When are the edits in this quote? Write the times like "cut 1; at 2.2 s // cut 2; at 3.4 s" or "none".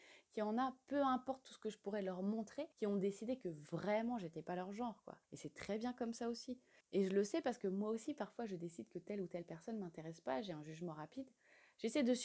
cut 1; at 2.7 s // cut 2; at 5.2 s // cut 3; at 6.8 s